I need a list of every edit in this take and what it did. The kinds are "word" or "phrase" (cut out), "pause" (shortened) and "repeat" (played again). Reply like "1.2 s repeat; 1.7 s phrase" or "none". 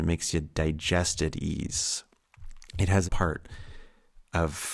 2.7 s pause; 3.1 s phrase